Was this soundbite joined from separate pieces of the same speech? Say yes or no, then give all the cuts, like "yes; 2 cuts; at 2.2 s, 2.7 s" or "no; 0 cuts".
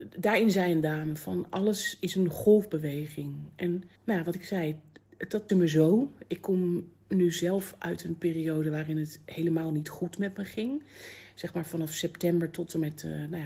yes; 2 cuts; at 4.0 s, 5.5 s